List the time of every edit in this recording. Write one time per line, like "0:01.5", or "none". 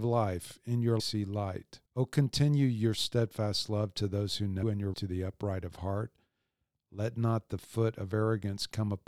0:01.0
0:01.9
0:04.6
0:04.9